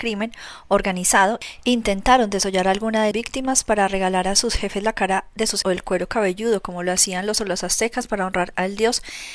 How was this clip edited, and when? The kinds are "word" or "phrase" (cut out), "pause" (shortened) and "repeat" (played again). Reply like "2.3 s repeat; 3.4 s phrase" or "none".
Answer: 3.1 s word; 5.6 s word; 7.4 s word